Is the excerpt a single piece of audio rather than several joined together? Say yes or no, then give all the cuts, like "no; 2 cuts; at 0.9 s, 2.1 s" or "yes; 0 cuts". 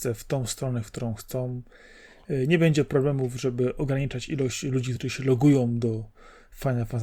yes; 0 cuts